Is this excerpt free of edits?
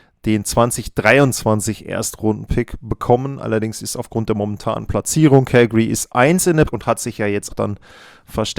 no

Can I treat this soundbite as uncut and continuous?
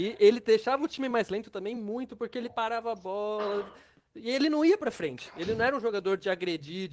yes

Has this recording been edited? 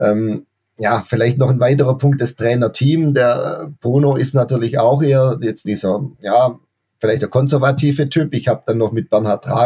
yes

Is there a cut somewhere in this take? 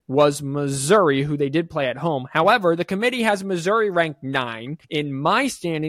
yes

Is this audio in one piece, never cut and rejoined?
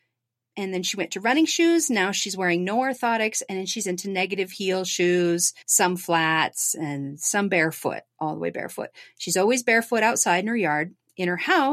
no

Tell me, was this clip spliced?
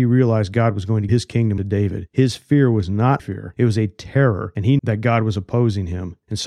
yes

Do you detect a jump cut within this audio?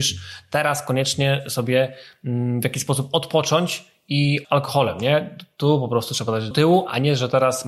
yes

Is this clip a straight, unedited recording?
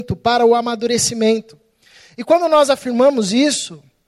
yes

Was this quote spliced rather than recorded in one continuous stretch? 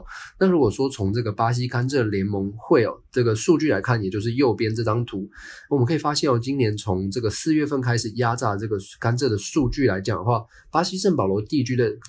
no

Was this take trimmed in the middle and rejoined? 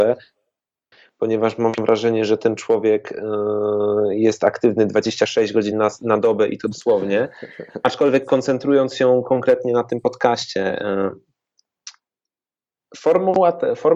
no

